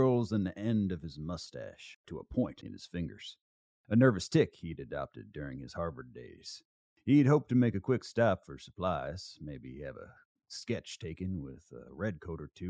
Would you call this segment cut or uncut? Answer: cut